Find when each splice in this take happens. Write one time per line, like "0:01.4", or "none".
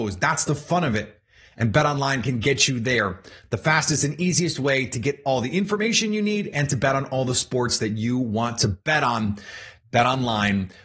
none